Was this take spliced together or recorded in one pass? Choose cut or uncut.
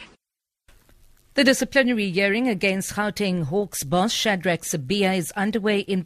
uncut